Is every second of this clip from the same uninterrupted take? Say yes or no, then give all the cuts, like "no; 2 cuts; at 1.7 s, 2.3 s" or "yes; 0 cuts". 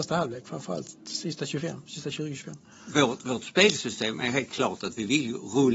yes; 0 cuts